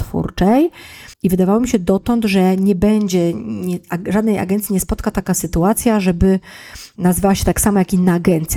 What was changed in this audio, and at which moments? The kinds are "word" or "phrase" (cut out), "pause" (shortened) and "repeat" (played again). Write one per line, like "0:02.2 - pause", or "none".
0:01.1 - pause

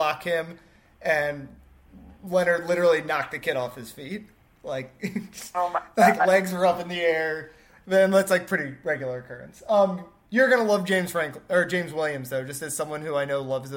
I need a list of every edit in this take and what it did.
none

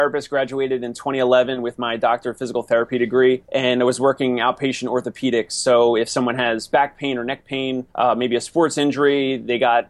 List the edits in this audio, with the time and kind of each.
0:03.4 - pause
0:07.9 - pause

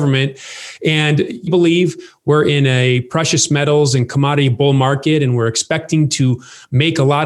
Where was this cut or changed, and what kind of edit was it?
0:01.5 - phrase

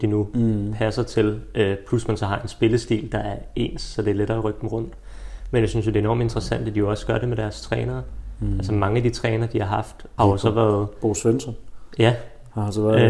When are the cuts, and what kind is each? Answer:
0:10.2 - word

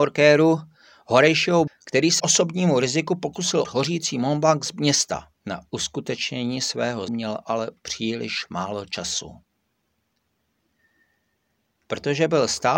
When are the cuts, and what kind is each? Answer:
0:01.7 - word
0:02.2 - word
0:03.6 - word
0:05.4 - pause
0:07.1 - word
0:07.8 - word

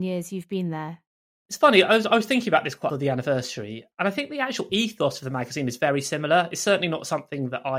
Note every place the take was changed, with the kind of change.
0:01.5 - word
0:02.9 - phrase
0:03.9 - pause

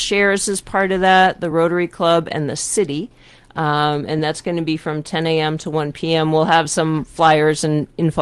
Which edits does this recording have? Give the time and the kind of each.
none

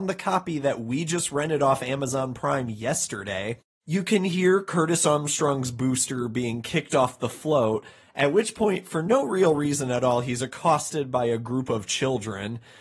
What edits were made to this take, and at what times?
none

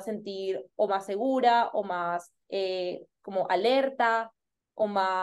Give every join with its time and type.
0:02.4 - pause

